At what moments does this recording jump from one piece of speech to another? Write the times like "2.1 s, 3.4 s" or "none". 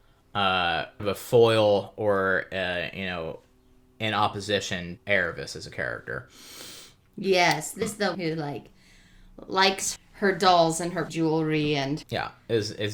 1.0 s, 5.0 s, 7.8 s, 8.1 s, 10.0 s, 11.1 s, 12.0 s